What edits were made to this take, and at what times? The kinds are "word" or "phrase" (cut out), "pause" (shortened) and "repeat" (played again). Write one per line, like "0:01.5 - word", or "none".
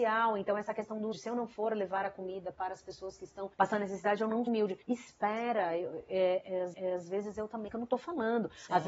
0:01.1 - word
0:03.5 - pause
0:04.5 - word
0:04.8 - pause
0:06.7 - repeat
0:07.7 - phrase